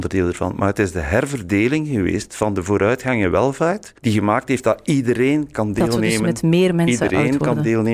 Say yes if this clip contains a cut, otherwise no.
yes